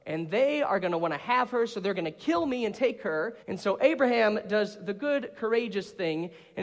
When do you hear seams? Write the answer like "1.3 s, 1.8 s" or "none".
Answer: 3.4 s